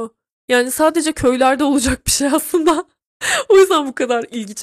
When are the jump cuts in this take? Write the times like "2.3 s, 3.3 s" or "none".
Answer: none